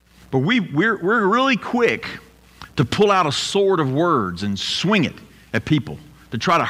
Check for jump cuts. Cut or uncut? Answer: uncut